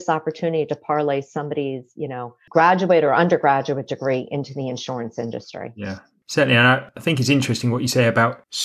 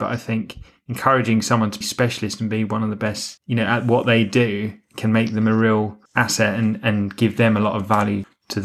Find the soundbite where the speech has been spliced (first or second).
second